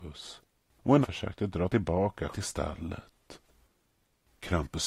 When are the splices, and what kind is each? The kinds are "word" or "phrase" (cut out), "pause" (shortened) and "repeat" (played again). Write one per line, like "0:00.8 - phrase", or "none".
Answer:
0:01.0 - word
0:02.3 - word